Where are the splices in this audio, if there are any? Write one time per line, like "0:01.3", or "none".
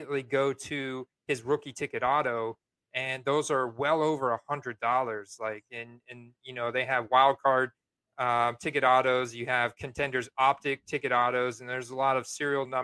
none